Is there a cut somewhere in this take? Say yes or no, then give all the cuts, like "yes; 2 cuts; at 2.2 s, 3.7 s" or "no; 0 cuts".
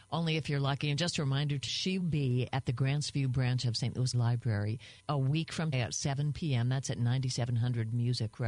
yes; 5 cuts; at 1.7 s, 2.0 s, 4.1 s, 5.0 s, 5.7 s